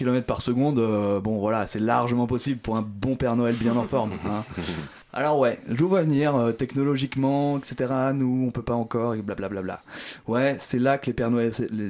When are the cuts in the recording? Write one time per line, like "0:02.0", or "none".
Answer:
0:05.0